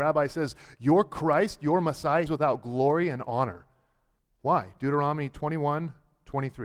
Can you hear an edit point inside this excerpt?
yes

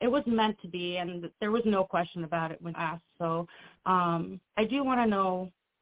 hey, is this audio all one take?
no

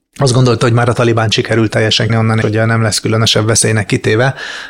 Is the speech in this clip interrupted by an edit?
yes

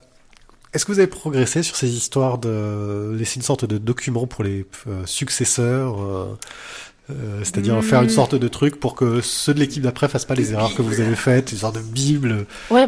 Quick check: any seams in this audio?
no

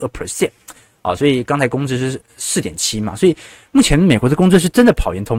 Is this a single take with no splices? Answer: yes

